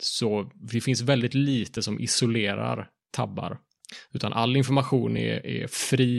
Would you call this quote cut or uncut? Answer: uncut